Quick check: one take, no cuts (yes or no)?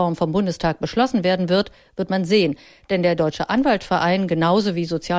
yes